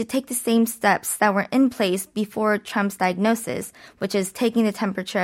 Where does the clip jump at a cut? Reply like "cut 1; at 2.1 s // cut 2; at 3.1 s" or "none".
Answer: none